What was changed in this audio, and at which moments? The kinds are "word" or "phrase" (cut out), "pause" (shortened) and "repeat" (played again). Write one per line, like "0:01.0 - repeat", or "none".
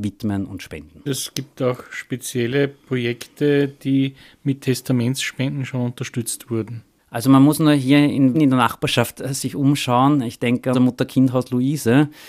0:08.3 - word
0:10.7 - word